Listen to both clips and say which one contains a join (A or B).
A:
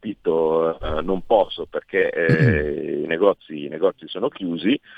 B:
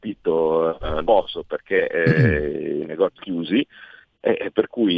B